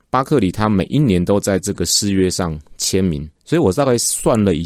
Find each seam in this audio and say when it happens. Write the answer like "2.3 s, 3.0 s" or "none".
3.4 s